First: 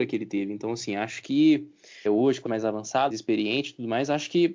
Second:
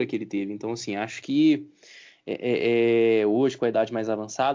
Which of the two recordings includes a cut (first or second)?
first